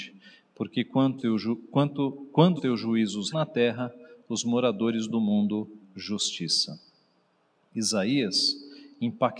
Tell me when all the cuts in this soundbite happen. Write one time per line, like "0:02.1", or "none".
0:01.2
0:02.6
0:03.3
0:05.8